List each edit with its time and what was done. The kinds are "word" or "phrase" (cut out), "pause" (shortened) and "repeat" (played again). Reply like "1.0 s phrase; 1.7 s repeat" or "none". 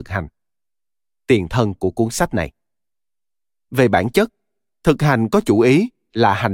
none

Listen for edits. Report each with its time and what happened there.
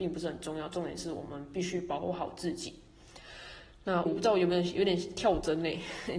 4.1 s word

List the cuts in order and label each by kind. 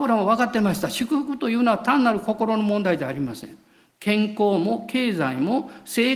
none

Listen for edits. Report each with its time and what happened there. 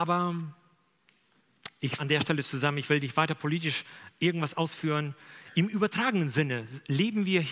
2.0 s word

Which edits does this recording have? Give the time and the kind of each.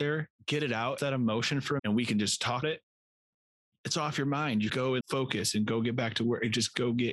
1.0 s word; 1.8 s word; 2.6 s word; 4.7 s word; 5.0 s word

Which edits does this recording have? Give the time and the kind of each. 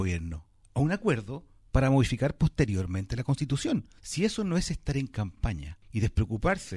none

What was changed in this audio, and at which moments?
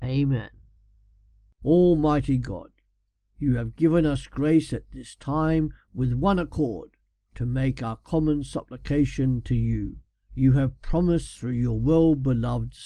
10.1 s pause

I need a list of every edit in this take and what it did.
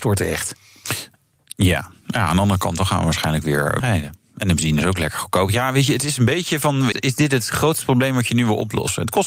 3.8 s word; 6.9 s word

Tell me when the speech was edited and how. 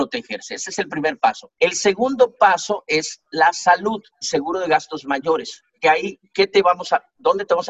1.6 s pause; 4.2 s word; 5.0 s word; 5.7 s pause

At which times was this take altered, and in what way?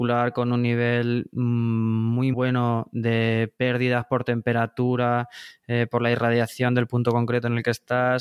2.3 s word

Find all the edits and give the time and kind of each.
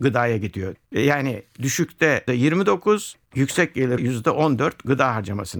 2.3 s word; 4.0 s word

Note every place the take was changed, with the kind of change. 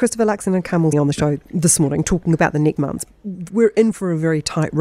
0.9 s word; 2.8 s word

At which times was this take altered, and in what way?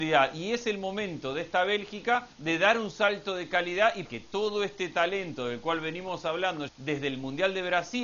2.3 s pause; 4.0 s word; 6.7 s word

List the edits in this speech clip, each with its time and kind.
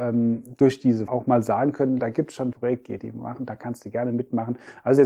1.1 s word; 2.0 s word; 2.5 s word; 3.0 s word

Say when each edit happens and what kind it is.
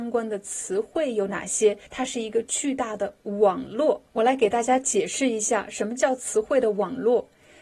1.9 s pause; 4.1 s pause

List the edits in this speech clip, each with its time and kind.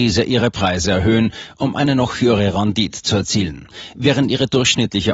none

